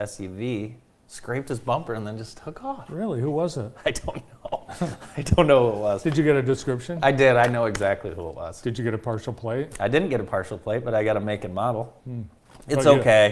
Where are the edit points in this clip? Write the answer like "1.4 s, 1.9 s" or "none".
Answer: 12.0 s